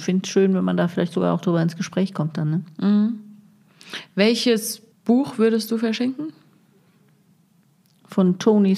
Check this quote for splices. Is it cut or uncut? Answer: cut